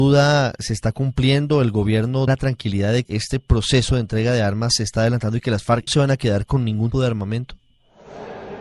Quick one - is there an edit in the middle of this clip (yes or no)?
yes